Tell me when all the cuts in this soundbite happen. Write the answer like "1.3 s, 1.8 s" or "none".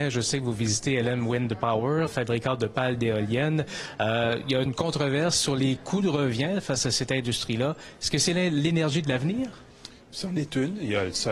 2.1 s, 4.7 s